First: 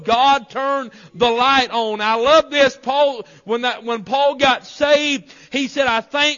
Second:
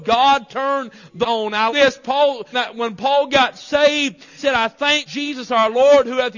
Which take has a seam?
second; 5 cuts; at 1.2 s, 1.7 s, 2.5 s, 4.4 s, 5.1 s

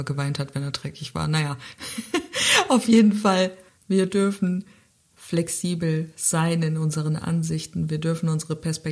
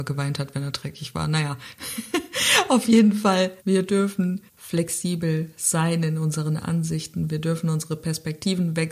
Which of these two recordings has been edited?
second; 2 cuts; at 3.6 s, 4.5 s

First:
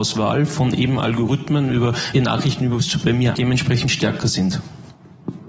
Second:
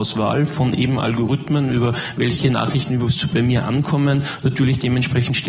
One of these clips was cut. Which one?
first; 2 cuts; at 2.1 s, 3.3 s

